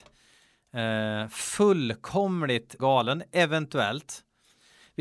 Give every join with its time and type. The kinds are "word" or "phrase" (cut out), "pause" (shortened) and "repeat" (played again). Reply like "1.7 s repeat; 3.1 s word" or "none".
2.8 s word

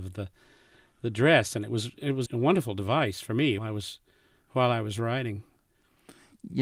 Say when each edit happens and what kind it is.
2.3 s word; 3.6 s word

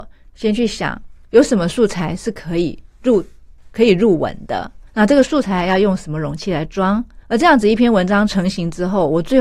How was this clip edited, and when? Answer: 4.9 s pause; 7.2 s pause

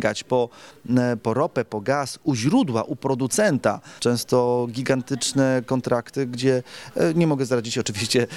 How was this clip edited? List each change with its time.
4.0 s word

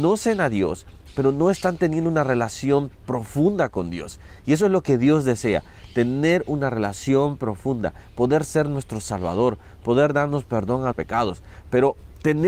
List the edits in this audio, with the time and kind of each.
10.9 s word

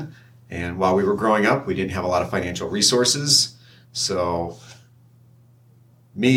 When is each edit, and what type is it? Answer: none

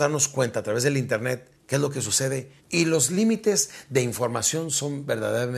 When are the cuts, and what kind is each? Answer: 1.5 s pause; 2.6 s pause

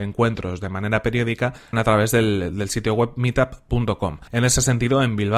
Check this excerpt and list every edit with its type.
4.3 s pause

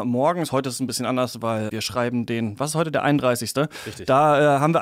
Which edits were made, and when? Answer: 1.7 s word

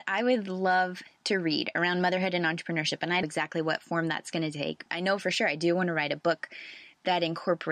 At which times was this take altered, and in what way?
3.2 s phrase

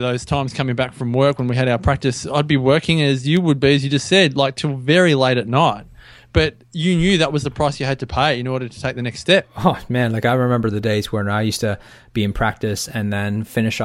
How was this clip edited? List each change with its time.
none

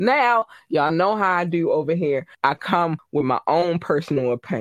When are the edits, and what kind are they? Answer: 2.3 s pause

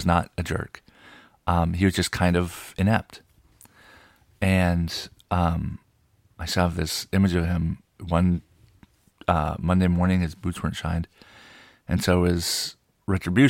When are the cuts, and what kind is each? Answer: none

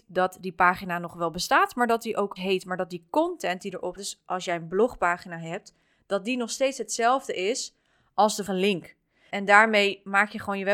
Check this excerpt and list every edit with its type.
2.4 s word; 4.0 s word; 8.5 s word; 9.3 s word

